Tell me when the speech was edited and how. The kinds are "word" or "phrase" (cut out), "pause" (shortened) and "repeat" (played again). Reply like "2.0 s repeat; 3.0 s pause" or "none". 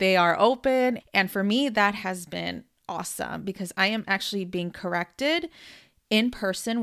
none